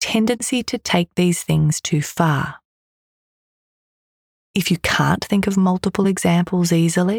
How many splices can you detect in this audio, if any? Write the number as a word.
zero